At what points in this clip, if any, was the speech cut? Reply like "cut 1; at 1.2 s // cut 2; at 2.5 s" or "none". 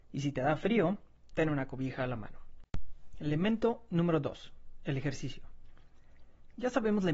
cut 1; at 1.3 s